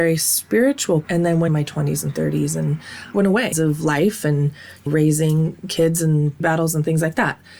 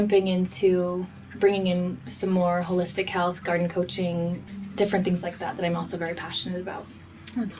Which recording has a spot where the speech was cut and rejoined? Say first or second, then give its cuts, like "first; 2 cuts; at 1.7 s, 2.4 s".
first; 6 cuts; at 1.0 s, 1.5 s, 3.1 s, 3.5 s, 4.9 s, 6.4 s